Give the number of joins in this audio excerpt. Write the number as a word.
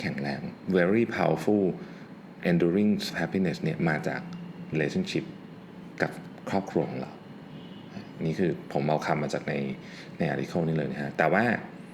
three